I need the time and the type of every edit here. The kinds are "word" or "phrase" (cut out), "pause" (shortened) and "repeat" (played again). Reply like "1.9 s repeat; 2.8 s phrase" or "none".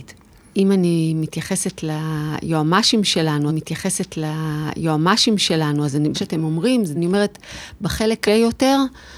3.5 s repeat; 6.1 s phrase; 7.0 s phrase; 8.3 s word